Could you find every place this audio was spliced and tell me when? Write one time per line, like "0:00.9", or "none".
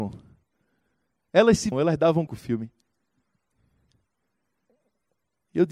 0:01.7
0:02.3